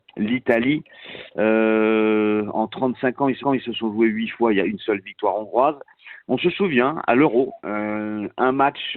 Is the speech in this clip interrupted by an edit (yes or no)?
yes